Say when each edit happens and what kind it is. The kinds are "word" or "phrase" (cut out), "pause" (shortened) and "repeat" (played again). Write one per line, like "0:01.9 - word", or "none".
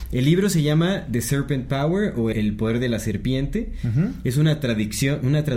0:02.3 - word